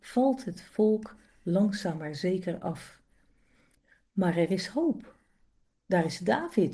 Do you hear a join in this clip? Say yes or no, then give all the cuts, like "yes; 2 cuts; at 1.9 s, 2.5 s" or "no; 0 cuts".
no; 0 cuts